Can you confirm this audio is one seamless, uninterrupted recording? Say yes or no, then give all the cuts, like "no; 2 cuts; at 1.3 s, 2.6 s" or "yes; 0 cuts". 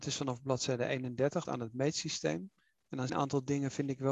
no; 3 cuts; at 1.4 s, 2.7 s, 3.1 s